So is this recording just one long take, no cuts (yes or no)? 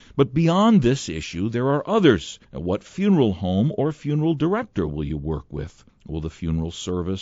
no